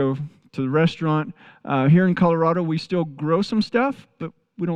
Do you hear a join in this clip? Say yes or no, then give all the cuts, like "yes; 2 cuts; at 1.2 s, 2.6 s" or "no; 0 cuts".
no; 0 cuts